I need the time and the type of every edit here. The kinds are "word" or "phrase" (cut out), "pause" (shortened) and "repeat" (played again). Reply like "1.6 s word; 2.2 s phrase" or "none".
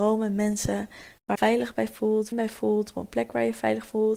1.3 s phrase; 2.3 s phrase